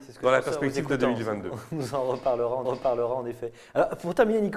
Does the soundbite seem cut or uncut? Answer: cut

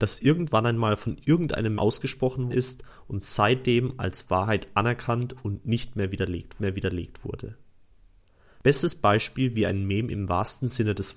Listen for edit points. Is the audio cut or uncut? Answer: cut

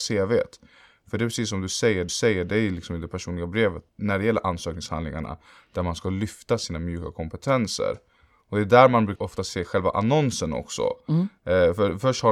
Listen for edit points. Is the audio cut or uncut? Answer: cut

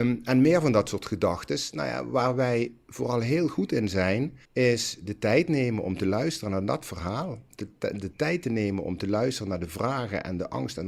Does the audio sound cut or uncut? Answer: cut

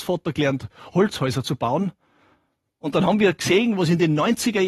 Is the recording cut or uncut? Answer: uncut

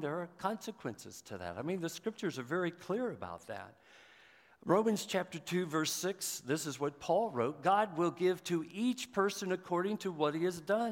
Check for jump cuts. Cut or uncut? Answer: uncut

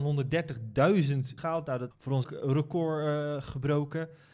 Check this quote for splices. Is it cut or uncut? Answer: cut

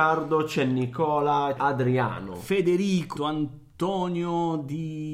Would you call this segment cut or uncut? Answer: cut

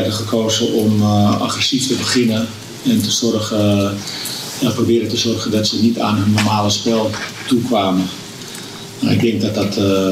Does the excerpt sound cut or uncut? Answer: uncut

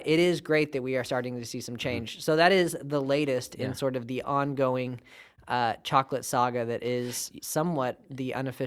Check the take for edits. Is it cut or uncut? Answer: uncut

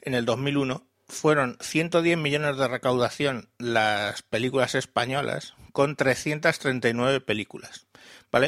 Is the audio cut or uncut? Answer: uncut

